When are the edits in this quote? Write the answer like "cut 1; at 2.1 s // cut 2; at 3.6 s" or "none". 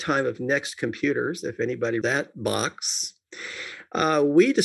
cut 1; at 2.0 s